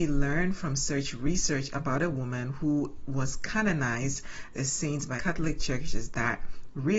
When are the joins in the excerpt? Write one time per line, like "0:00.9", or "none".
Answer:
0:04.5
0:05.2